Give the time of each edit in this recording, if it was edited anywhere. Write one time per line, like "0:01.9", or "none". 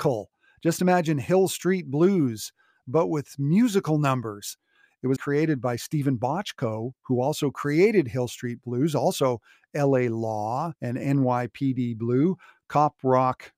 0:05.2
0:10.8